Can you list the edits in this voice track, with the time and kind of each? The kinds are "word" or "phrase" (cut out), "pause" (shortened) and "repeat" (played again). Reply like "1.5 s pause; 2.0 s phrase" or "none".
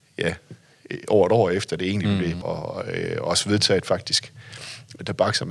2.4 s phrase